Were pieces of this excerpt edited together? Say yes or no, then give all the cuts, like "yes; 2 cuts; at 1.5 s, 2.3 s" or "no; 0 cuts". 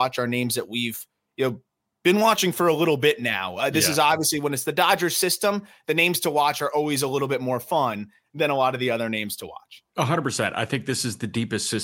no; 0 cuts